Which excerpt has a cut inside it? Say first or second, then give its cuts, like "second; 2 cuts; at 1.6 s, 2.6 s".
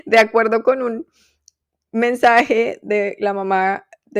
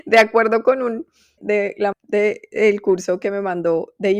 second; 2 cuts; at 1.4 s, 1.9 s